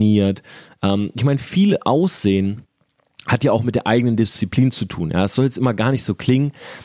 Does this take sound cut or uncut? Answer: uncut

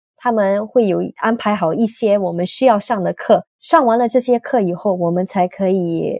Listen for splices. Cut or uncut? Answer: uncut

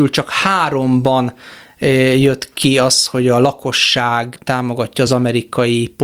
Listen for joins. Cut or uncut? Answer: uncut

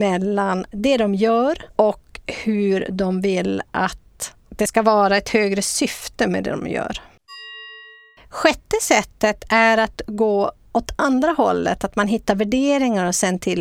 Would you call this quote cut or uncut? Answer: cut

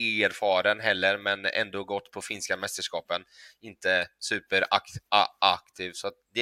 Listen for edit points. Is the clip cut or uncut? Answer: uncut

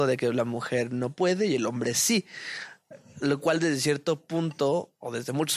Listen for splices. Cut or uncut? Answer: uncut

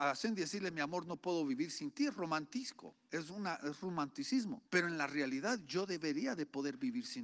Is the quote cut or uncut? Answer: cut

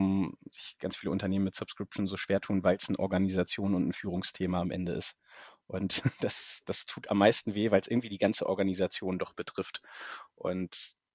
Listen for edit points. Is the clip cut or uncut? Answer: uncut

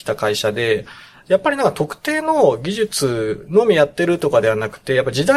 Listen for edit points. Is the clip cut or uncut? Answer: uncut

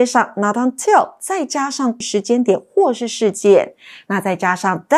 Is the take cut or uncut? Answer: uncut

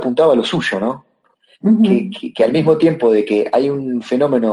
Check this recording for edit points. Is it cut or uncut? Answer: uncut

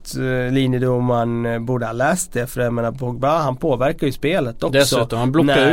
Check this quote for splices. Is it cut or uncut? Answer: uncut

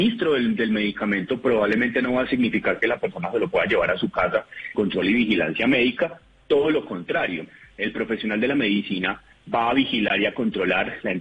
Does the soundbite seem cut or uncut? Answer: cut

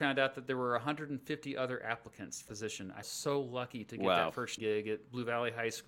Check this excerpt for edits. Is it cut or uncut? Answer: cut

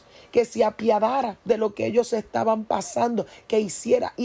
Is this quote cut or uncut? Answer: cut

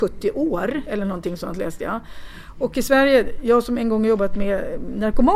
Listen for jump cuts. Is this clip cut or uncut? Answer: uncut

